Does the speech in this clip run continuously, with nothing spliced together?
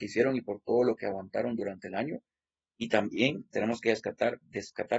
yes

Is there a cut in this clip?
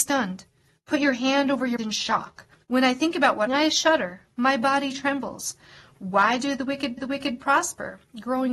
yes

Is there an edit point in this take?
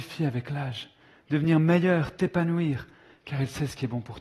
no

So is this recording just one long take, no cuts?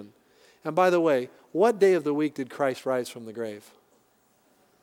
yes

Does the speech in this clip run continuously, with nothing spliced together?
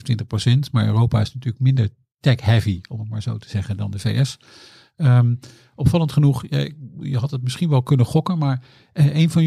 yes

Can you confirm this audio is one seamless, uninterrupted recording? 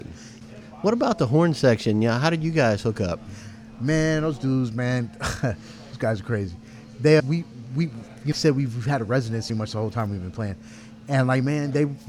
no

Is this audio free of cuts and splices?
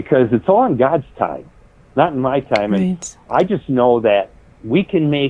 yes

